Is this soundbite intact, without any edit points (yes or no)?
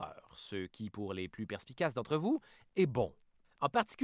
yes